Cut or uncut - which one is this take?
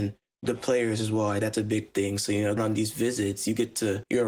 cut